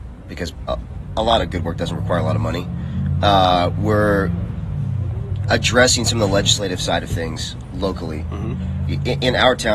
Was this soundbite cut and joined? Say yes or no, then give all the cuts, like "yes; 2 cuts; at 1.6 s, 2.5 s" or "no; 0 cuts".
no; 0 cuts